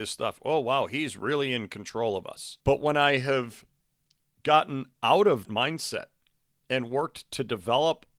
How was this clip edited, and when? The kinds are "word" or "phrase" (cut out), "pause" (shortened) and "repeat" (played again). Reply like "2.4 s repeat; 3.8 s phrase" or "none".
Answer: 2.6 s pause; 5.4 s word

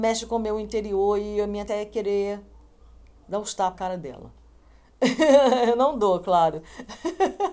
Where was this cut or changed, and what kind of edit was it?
1.7 s word; 3.7 s word

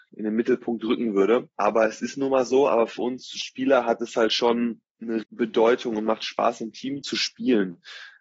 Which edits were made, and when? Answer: 1.5 s pause; 5.2 s word

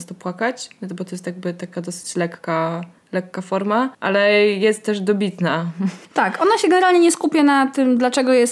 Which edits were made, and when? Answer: 3.0 s pause; 3.9 s pause; 6.0 s pause

